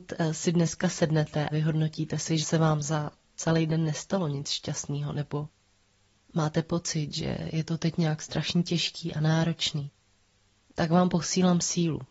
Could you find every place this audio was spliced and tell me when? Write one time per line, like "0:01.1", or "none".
0:01.5
0:02.4